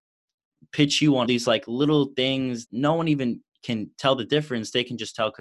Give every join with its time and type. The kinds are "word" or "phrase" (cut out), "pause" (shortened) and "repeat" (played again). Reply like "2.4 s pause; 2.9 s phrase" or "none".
1.2 s word; 2.6 s word